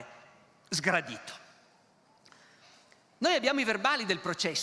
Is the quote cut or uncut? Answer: uncut